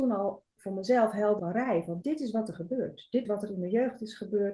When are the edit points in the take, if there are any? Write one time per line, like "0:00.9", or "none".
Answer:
0:01.4
0:02.0
0:03.3